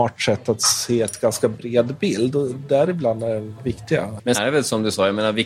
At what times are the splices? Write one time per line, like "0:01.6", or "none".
0:04.3